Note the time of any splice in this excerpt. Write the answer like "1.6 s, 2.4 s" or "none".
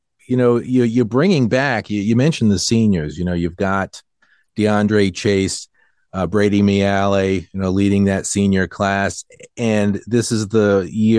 none